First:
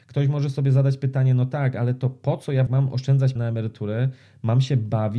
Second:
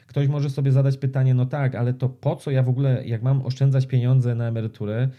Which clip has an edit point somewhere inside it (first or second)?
first